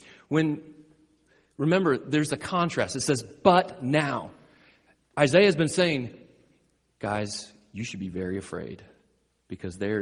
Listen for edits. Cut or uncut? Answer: uncut